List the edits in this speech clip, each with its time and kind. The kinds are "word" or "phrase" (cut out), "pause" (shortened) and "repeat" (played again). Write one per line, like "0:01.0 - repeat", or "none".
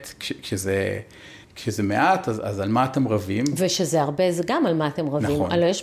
0:01.4 - pause